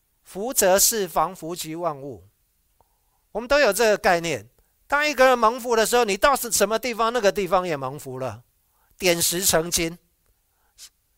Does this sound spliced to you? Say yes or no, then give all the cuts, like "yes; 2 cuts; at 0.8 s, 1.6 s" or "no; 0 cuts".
no; 0 cuts